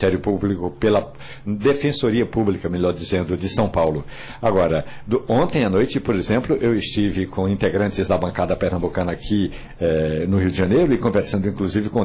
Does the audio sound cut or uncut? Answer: uncut